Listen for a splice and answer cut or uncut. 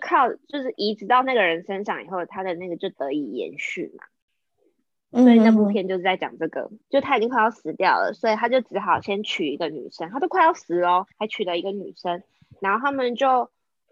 cut